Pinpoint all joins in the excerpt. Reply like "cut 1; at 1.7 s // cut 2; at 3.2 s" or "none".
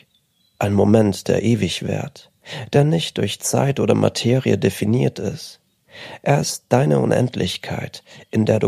none